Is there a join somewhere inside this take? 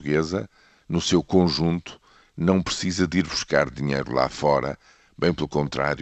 no; 0 cuts

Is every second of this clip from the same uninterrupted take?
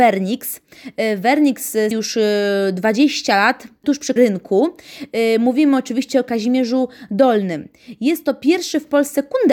no; 3 cuts; at 1.9 s, 3.8 s, 4.2 s

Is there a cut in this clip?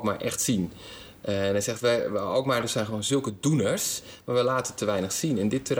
no; 0 cuts

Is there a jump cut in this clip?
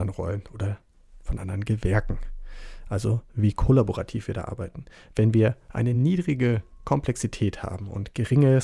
no; 0 cuts

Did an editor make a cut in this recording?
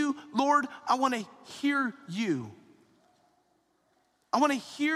no; 0 cuts

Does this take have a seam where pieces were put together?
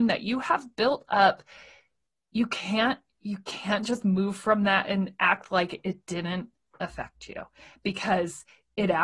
no; 0 cuts

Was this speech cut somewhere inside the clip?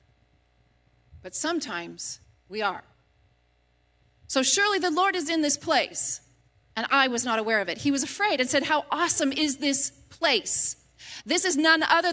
no; 0 cuts

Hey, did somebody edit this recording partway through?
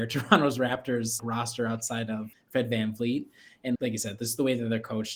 yes; 3 cuts; at 1.2 s, 2.3 s, 3.8 s

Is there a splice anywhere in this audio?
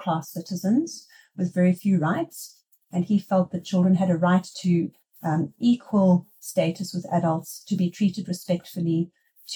no; 0 cuts

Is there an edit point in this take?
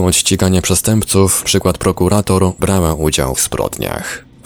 yes; 3 cuts; at 1.4 s, 2.6 s, 3.3 s

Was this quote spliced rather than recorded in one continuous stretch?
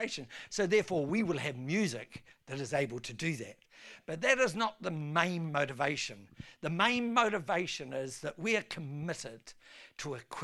no; 0 cuts

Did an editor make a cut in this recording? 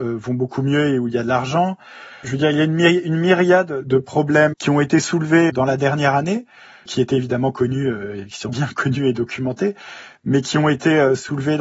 yes; 5 cuts; at 2.2 s, 4.5 s, 5.5 s, 6.9 s, 8.5 s

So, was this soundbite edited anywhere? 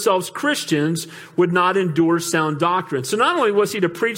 no; 0 cuts

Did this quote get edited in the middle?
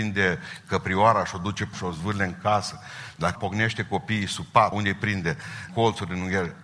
yes; 4 cuts; at 1.7 s, 3.3 s, 4.7 s, 5.7 s

